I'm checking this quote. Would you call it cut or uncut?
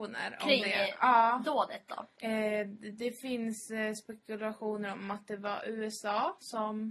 cut